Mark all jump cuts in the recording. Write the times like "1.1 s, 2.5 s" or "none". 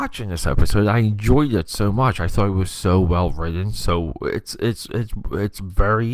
none

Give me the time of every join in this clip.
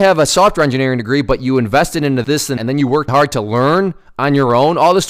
2.2 s, 2.6 s, 3.1 s

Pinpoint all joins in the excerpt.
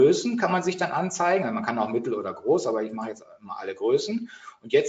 none

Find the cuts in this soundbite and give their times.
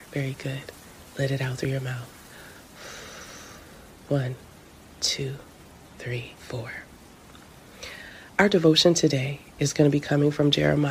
6.4 s

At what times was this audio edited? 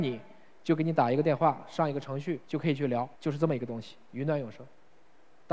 2.4 s, 3.1 s

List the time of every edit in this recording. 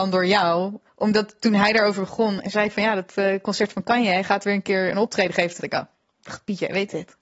5.6 s

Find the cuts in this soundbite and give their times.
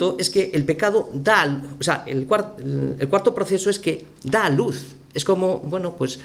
none

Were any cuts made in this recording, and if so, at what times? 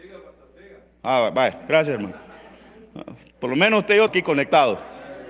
4.1 s

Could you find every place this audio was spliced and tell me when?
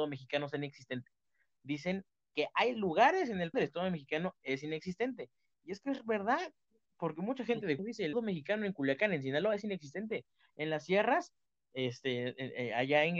3.5 s, 7.8 s, 8.1 s

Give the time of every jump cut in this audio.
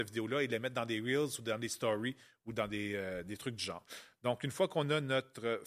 none

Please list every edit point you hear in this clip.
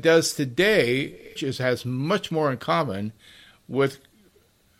1.4 s

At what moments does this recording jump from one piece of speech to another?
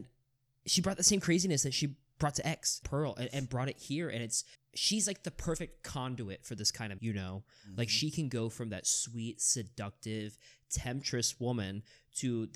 2.8 s, 4.5 s, 7.0 s

